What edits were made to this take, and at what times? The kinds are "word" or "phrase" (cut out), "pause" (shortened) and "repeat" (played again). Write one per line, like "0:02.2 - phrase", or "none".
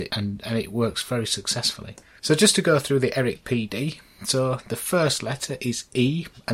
none